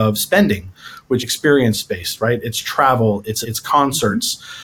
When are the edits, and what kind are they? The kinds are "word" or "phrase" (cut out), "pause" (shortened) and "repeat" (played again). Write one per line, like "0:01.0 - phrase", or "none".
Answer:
0:01.2 - word
0:03.4 - word